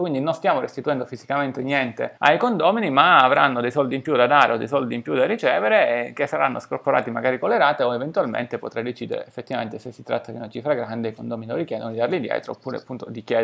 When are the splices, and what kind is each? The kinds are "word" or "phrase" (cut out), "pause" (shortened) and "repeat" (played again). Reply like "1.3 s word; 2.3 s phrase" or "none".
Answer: 2.2 s pause